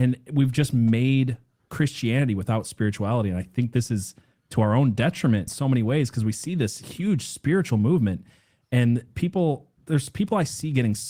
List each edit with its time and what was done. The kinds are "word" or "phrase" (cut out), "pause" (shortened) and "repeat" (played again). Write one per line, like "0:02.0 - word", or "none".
0:05.5 - word